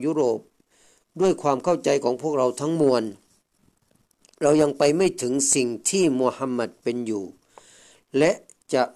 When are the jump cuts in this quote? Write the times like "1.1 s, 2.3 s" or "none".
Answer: none